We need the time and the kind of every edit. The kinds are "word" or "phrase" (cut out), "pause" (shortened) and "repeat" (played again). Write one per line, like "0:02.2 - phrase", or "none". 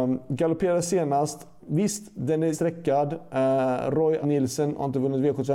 0:01.6 - word
0:02.5 - word
0:04.2 - word